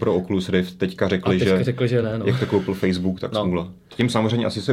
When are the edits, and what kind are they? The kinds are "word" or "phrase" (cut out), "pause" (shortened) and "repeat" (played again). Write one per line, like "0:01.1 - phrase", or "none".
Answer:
none